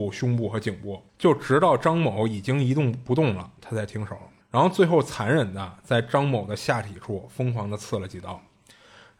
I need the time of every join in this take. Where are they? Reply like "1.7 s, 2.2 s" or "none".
1.1 s, 4.4 s